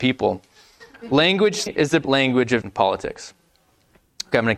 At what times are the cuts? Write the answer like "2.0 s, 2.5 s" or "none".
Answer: 1.7 s, 2.0 s, 2.6 s